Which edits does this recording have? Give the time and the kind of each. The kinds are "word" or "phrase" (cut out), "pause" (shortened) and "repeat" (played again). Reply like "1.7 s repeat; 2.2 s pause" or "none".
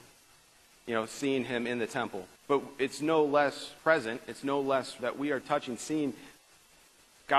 2.4 s pause; 3.8 s pause; 5.0 s word; 5.4 s word

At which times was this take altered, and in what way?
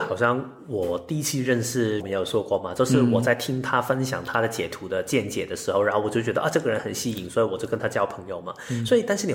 2.0 s word

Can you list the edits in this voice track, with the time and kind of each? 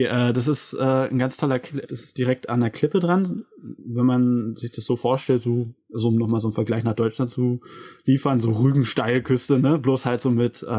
1.8 s word

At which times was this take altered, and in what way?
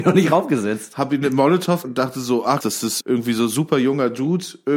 1.8 s word; 2.6 s word; 3.0 s word

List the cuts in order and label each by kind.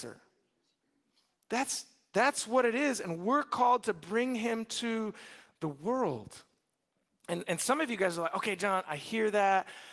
none

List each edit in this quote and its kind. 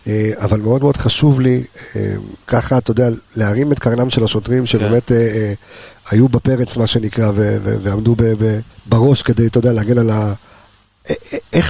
2.4 s pause; 8.7 s pause

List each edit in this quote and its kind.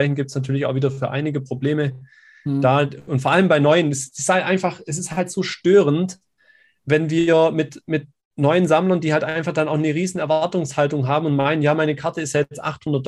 none

